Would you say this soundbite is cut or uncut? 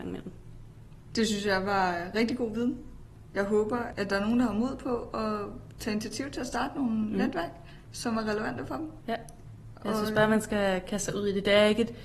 uncut